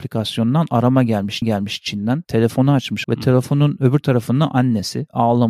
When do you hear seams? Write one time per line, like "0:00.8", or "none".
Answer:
0:01.4
0:03.0

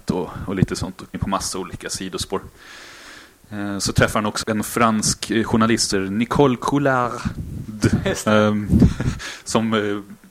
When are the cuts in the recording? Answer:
0:01.1
0:04.4
0:05.9

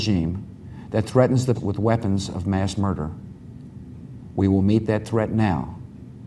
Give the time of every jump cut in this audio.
0:01.5

